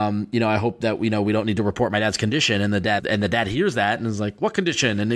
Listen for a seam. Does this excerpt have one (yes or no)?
yes